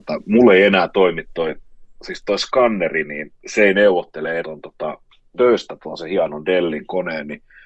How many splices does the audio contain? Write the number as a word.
three